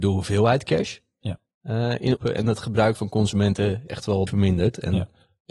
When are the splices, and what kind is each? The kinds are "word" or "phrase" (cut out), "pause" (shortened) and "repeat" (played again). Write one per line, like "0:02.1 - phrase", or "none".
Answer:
0:02.2 - word
0:02.9 - word
0:03.9 - word
0:04.3 - word

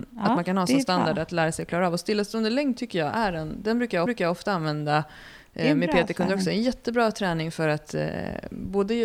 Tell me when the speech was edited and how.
0:04.1 - repeat

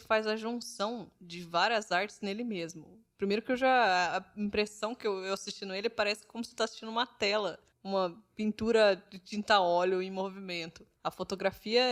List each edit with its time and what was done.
0:07.7 - pause

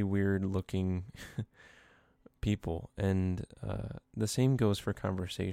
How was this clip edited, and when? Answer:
none

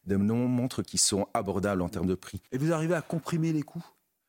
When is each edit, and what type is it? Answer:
0:02.5 - pause

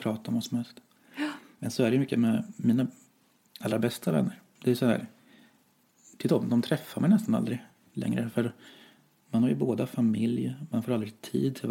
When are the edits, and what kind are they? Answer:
none

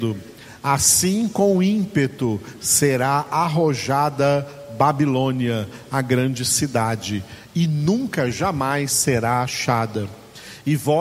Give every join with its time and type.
none

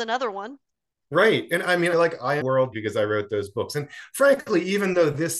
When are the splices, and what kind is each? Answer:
0:01.9 - phrase
0:02.4 - phrase
0:02.7 - word

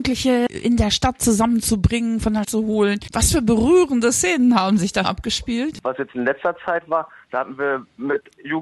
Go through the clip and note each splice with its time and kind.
0:02.4 - word
0:05.0 - word

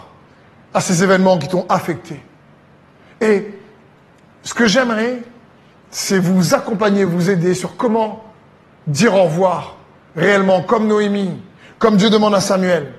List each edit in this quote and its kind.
none

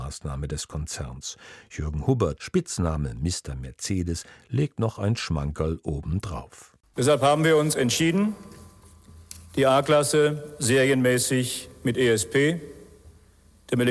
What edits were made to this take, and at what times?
0:02.4 - phrase

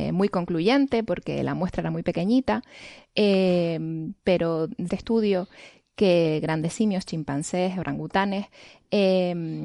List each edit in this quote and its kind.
0:04.9 - phrase

